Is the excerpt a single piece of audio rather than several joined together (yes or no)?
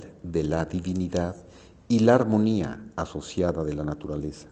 yes